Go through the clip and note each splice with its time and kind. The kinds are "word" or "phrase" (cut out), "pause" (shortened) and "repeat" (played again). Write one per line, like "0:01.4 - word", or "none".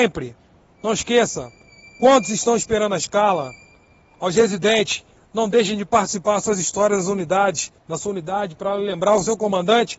none